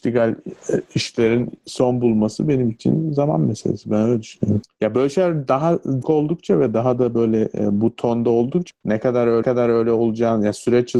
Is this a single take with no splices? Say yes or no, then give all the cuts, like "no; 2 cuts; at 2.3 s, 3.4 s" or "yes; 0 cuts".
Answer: no; 3 cuts; at 6.0 s, 8.7 s, 9.4 s